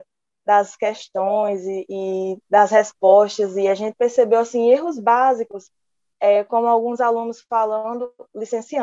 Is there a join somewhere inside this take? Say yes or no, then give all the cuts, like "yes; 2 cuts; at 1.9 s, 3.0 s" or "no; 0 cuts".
no; 0 cuts